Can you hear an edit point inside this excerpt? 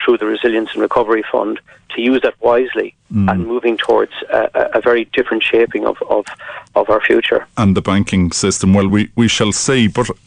no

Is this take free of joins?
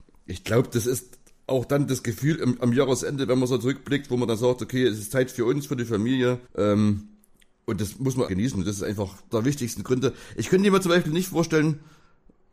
no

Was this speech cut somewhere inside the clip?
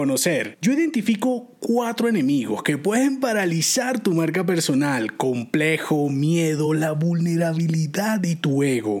no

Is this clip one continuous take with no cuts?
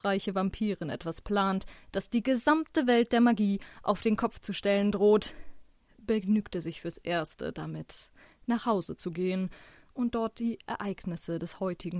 yes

